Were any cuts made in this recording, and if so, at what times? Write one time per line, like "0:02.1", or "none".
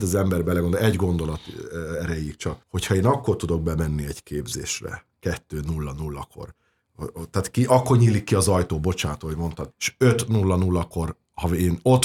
0:02.6
0:09.7